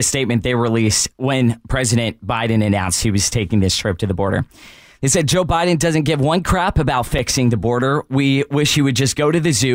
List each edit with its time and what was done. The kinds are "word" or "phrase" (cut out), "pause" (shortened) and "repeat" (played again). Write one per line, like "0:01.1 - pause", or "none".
none